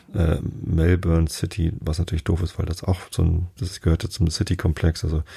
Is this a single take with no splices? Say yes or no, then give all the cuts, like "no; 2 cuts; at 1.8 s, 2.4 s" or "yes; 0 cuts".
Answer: no; 1 cut; at 3.6 s